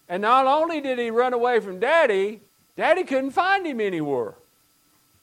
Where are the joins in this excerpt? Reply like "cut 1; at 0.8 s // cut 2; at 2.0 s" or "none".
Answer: cut 1; at 2.5 s